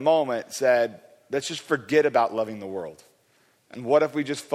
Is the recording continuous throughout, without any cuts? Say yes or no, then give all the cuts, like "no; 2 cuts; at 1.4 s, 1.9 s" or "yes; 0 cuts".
yes; 0 cuts